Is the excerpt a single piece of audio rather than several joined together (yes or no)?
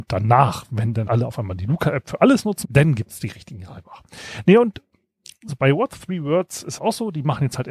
no